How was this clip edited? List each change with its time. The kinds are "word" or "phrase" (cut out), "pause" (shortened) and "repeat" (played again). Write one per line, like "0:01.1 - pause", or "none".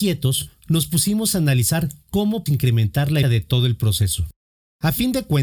0:02.5 - word
0:03.2 - word